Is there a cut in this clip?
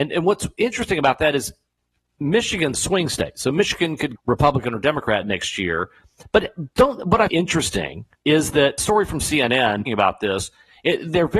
yes; 6 cuts; at 2.7 s, 4.2 s, 7.3 s, 8.1 s, 8.8 s, 9.8 s

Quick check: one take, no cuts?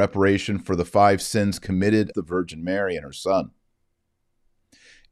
no; 1 cut; at 2.1 s

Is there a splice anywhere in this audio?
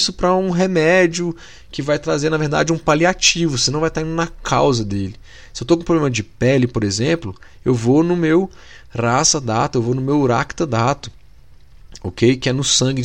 no; 0 cuts

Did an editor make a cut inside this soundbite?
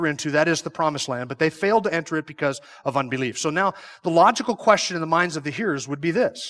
no; 0 cuts

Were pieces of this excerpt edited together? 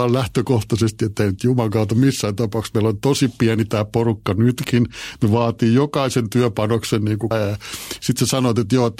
yes; 1 cut; at 7.3 s

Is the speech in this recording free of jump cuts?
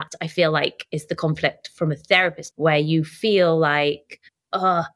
no; 1 cut; at 2.5 s

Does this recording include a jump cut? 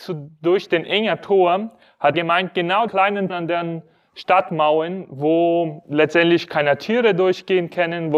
yes; 3 cuts; at 2.1 s, 2.9 s, 3.3 s

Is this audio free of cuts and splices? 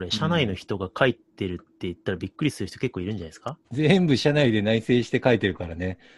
no; 1 cut; at 3.6 s

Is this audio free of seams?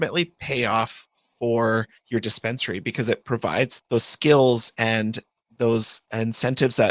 yes; 0 cuts

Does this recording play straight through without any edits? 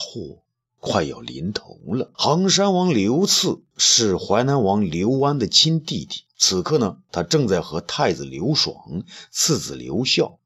no; 2 cuts; at 2.1 s, 6.3 s

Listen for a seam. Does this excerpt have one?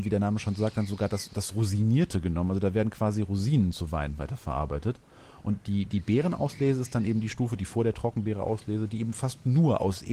no; 0 cuts

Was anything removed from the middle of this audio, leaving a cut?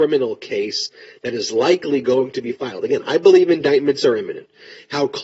no; 0 cuts

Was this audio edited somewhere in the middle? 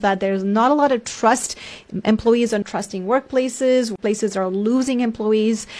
yes; 1 cut; at 2.6 s

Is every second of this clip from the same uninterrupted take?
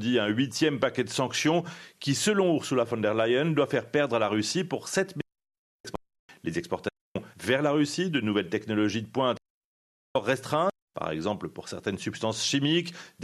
no; 1 cut; at 6.2 s

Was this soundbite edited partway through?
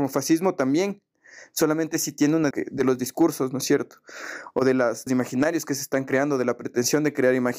yes; 2 cuts; at 2.5 s, 5.1 s

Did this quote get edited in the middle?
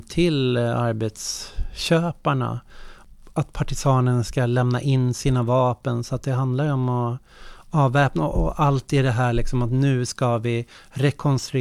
no; 0 cuts

